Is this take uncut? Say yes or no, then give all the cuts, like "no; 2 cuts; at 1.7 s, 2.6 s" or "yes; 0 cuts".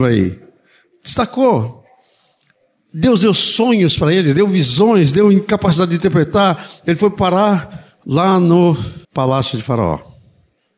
no; 1 cut; at 9.0 s